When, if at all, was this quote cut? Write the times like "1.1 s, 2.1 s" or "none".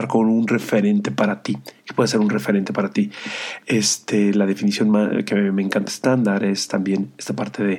5.9 s